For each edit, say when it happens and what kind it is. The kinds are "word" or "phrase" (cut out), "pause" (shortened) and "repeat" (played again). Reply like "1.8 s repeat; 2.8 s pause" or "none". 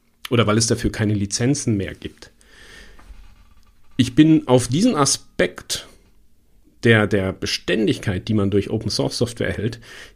none